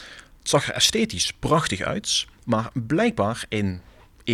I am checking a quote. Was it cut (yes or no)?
yes